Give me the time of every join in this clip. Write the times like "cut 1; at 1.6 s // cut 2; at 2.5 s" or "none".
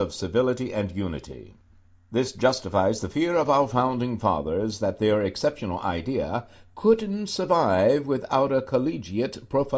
none